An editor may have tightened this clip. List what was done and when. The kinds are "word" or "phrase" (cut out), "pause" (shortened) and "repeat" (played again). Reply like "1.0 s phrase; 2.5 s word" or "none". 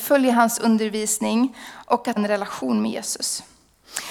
2.2 s word